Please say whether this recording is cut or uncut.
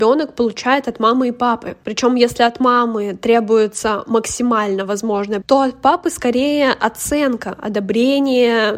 cut